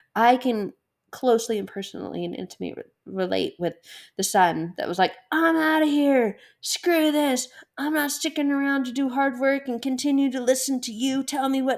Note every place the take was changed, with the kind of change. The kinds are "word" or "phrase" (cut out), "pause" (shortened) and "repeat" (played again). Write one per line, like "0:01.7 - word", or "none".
none